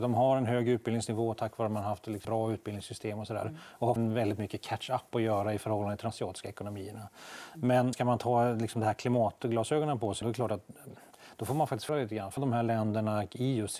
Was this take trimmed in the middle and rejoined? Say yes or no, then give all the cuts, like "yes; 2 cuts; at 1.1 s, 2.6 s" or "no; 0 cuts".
yes; 7 cuts; at 2.2 s, 4.0 s, 6.1 s, 7.9 s, 10.2 s, 11.9 s, 12.4 s